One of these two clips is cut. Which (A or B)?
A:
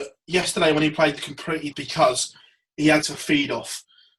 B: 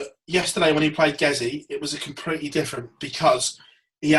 A